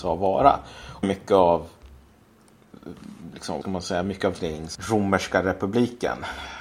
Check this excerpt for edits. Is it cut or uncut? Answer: cut